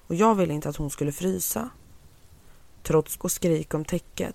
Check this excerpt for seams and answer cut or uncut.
cut